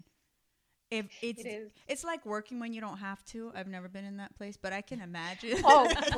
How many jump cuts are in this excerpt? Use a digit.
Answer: 0